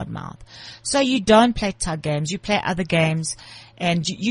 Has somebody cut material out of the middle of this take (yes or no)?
no